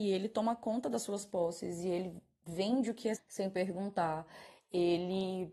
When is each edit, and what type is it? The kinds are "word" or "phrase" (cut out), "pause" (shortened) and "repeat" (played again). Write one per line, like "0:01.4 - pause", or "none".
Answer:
0:03.2 - word